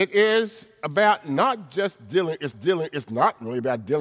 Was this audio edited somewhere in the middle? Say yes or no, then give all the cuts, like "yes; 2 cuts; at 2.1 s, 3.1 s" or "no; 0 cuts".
yes; 1 cut; at 2.5 s